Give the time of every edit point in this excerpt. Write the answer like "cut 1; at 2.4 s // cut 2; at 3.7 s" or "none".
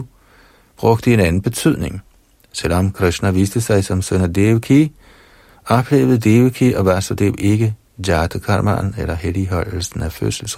none